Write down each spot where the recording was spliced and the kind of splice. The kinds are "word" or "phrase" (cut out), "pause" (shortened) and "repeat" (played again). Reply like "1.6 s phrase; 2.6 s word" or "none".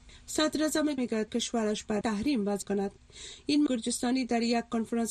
1.0 s word; 1.3 s word; 2.0 s word; 2.6 s word; 3.7 s word